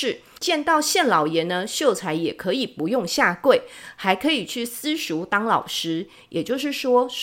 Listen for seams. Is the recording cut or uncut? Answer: uncut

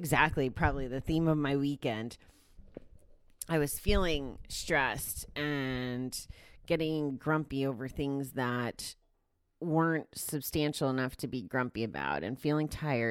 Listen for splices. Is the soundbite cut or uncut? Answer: uncut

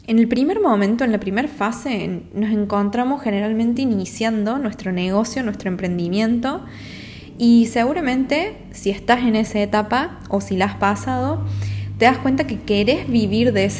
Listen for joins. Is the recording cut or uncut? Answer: uncut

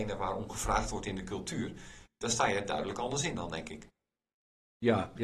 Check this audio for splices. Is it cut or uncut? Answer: uncut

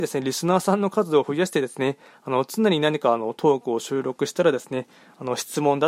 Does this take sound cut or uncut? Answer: uncut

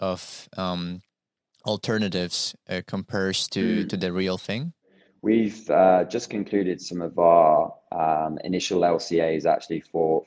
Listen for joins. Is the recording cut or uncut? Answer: uncut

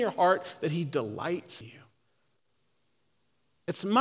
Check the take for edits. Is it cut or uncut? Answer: cut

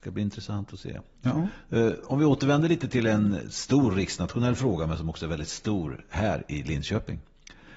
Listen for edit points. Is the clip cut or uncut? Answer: uncut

